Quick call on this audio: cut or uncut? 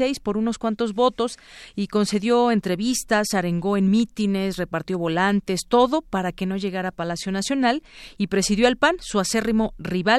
uncut